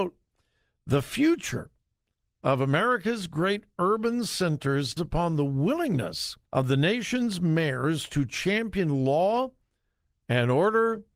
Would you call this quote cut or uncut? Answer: cut